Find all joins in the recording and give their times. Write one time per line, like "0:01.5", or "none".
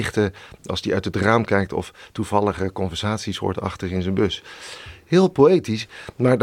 none